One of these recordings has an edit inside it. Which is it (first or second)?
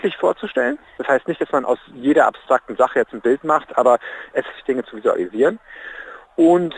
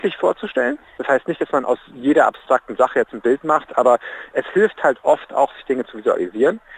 first